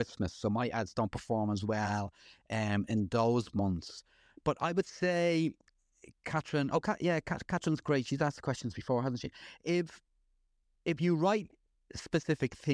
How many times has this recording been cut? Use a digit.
0